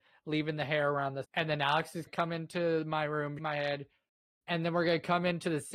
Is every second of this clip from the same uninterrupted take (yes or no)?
no